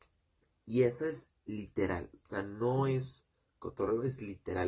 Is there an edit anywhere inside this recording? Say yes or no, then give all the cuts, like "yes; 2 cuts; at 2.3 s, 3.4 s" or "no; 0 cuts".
no; 0 cuts